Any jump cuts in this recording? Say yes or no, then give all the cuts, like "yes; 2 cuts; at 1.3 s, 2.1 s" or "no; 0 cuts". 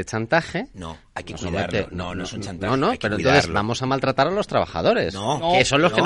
no; 0 cuts